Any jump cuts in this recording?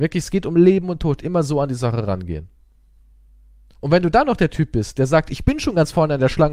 no; 0 cuts

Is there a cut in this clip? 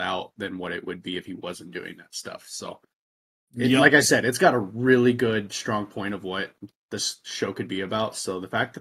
no; 0 cuts

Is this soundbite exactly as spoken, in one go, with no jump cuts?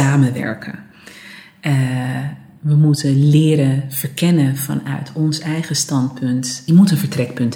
yes; 0 cuts

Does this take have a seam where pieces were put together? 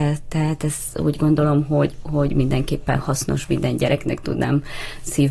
no; 0 cuts

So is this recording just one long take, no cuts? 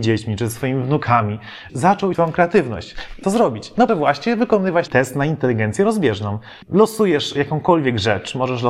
no; 6 cuts; at 1.7 s, 2.1 s, 3.2 s, 3.9 s, 4.9 s, 6.6 s

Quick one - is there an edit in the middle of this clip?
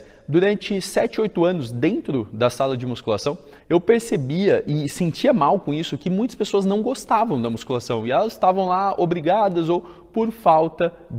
yes; 1 cut; at 3.6 s

